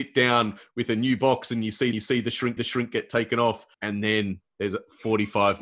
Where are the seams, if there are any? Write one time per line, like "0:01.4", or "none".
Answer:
0:01.9
0:02.6
0:03.7
0:04.5